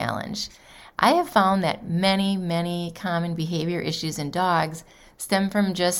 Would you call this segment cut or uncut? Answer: uncut